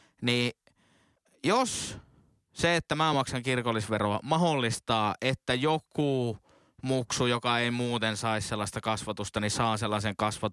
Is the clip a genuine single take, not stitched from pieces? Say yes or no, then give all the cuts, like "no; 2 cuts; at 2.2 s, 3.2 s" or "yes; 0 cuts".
yes; 0 cuts